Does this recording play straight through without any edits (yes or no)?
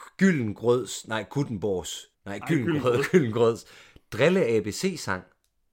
no